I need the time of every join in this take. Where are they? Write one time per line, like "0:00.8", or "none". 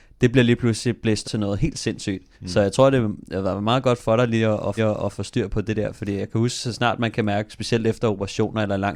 0:01.2
0:02.3
0:04.8
0:05.5

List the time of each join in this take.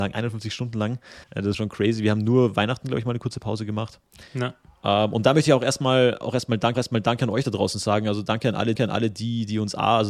0:01.2
0:01.5
0:04.3
0:06.7
0:08.8

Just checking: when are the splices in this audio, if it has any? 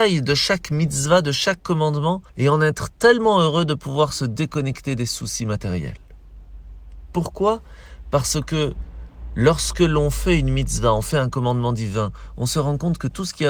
0:02.3

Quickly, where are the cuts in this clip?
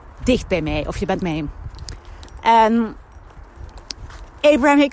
0:01.2

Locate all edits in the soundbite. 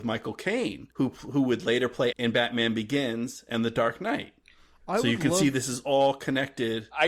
0:00.9
0:02.1

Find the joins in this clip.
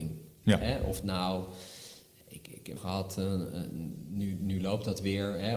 0:01.0
0:02.8

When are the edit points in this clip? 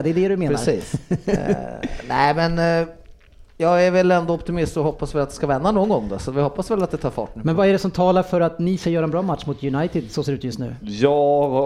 0:10.2

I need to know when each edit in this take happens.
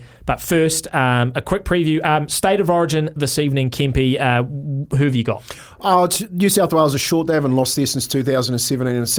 none

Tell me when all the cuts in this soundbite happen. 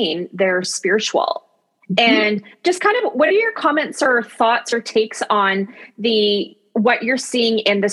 none

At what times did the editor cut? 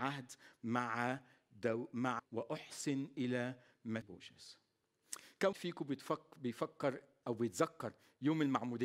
0:02.2
0:04.0
0:05.5
0:07.2

